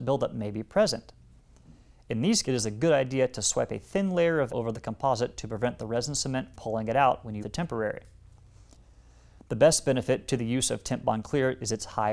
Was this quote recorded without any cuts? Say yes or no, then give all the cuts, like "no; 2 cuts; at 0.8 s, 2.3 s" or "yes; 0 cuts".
no; 4 cuts; at 2.4 s, 4.5 s, 6.5 s, 7.4 s